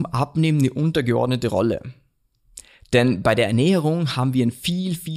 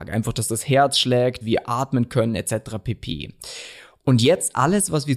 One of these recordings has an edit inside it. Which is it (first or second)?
second